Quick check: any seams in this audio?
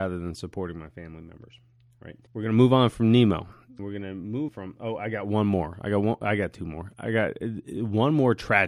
yes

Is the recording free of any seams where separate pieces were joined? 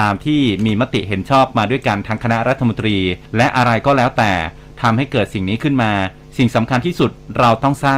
no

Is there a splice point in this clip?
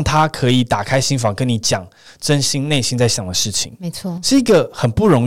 no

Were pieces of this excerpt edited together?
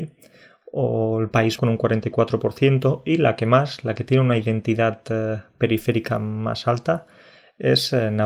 yes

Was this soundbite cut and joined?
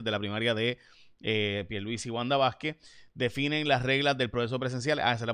no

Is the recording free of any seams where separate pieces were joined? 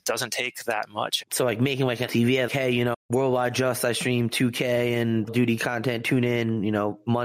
no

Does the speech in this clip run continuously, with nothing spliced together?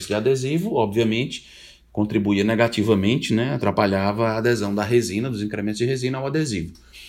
yes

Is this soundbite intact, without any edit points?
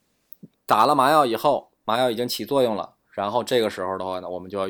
yes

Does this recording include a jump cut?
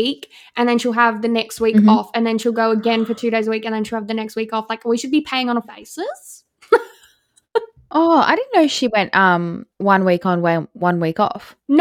yes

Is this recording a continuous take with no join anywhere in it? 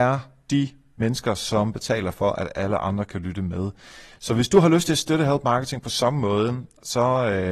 yes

